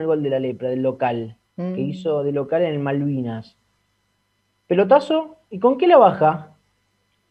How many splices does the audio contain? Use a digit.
1